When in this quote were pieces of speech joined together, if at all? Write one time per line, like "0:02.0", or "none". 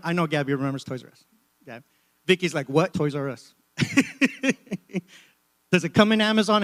0:02.9